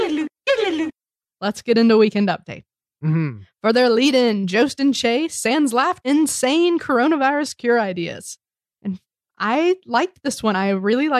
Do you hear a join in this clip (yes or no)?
yes